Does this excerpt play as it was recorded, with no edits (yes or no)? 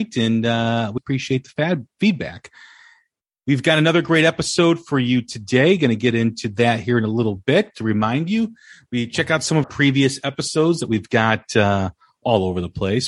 no